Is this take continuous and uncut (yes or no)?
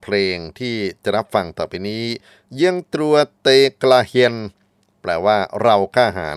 yes